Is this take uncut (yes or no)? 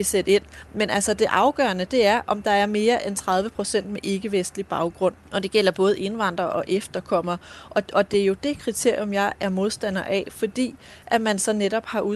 no